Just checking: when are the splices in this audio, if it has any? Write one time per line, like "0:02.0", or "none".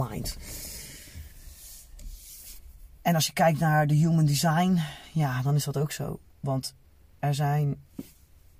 0:06.3